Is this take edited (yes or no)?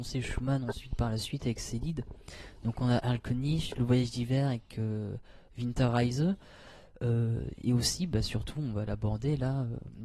no